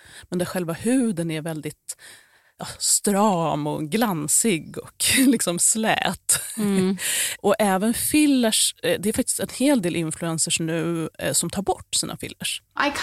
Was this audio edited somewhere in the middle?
no; 0 cuts

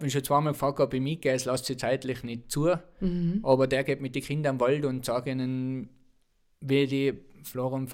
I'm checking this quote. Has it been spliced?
no; 0 cuts

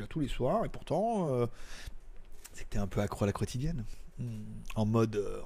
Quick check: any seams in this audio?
no; 0 cuts

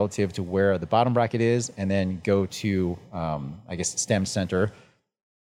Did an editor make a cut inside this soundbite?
no; 0 cuts

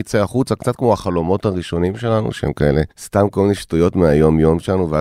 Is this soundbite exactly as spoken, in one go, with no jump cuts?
no; 1 cut; at 2.9 s

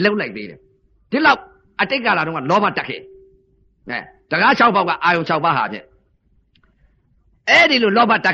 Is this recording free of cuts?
yes; 0 cuts

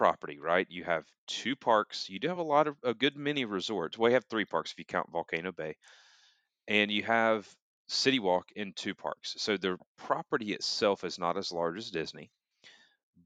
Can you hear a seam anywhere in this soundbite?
no; 0 cuts

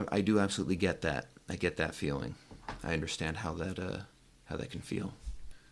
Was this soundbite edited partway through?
no; 0 cuts

